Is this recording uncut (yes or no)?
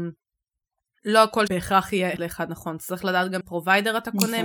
no